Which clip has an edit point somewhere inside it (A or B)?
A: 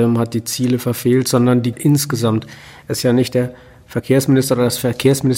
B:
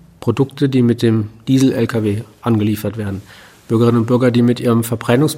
A